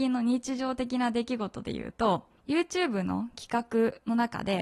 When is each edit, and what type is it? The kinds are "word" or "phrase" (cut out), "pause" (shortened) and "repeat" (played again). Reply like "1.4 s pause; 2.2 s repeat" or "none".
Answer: 2.4 s pause